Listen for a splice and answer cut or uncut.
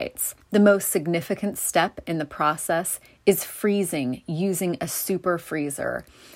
uncut